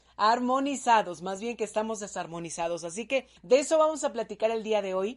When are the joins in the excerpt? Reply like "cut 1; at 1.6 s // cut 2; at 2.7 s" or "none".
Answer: cut 1; at 3.4 s

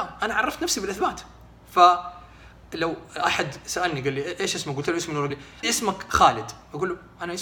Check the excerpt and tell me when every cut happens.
cut 1; at 5.3 s // cut 2; at 5.6 s

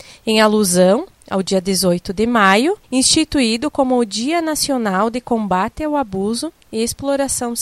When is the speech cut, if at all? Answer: cut 1; at 2.8 s

